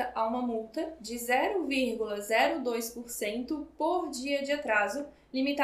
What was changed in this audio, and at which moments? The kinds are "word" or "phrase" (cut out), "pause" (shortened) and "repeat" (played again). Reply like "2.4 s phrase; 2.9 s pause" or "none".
none